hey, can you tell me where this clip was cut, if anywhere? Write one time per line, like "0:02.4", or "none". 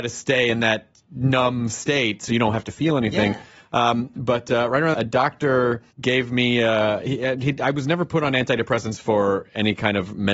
0:04.9
0:05.9